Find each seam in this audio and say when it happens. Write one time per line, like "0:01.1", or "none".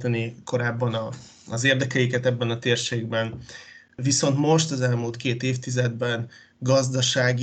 none

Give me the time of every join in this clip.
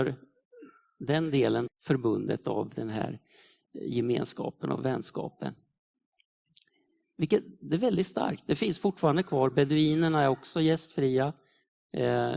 0:01.7

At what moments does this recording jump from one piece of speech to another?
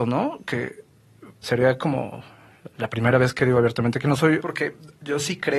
0:01.4
0:04.4

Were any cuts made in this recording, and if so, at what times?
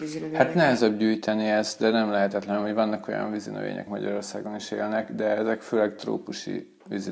0:03.9

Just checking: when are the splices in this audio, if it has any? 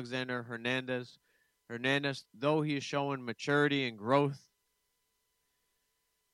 0:02.2

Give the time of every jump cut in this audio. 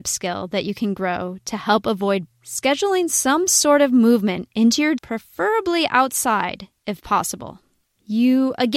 0:02.3
0:05.0

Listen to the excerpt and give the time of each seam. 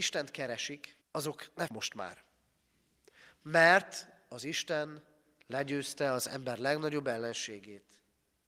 0:01.0
0:01.7

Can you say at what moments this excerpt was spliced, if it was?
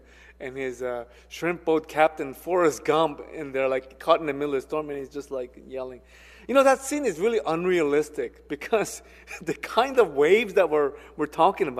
none

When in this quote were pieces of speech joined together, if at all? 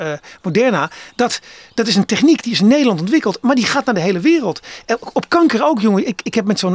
none

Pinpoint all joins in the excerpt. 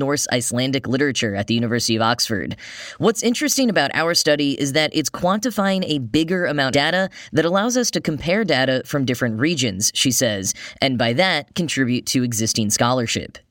0:06.7

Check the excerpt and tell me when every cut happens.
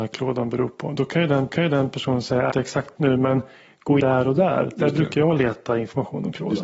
0:01.5
0:02.5
0:03.0
0:04.0

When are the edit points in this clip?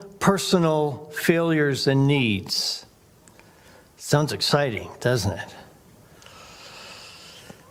none

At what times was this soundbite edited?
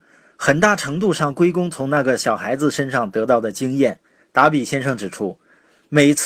0:04.2

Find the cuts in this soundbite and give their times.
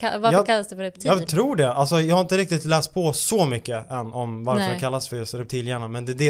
none

